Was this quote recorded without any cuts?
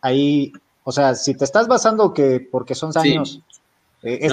no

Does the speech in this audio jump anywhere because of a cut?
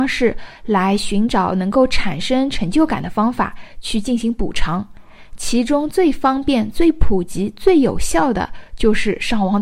no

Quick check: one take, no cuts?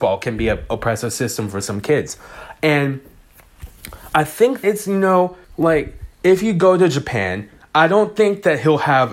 no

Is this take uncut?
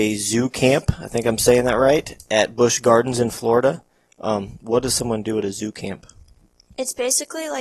yes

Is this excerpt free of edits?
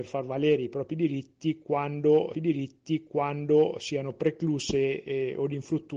no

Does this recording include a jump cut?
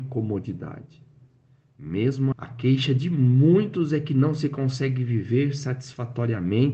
yes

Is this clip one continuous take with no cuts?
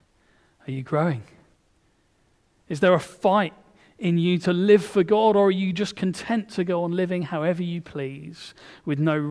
yes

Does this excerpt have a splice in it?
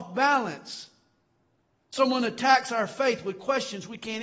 no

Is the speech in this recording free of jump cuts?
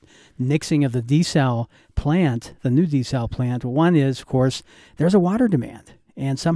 yes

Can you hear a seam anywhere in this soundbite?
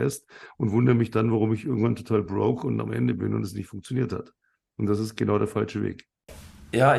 no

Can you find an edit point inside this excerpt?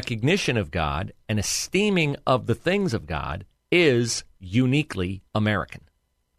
yes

